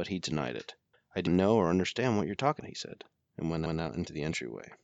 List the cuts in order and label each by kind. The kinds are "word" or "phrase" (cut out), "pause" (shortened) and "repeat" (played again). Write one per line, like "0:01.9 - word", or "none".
0:00.9 - pause
0:01.3 - word
0:02.6 - word
0:03.7 - repeat